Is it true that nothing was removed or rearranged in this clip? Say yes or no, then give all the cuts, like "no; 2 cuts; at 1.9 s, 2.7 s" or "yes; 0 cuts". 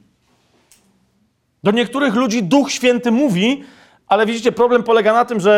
yes; 0 cuts